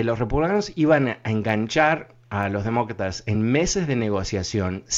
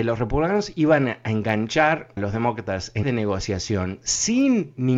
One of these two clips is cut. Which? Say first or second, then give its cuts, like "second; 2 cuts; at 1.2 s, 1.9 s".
second; 2 cuts; at 2.2 s, 3.0 s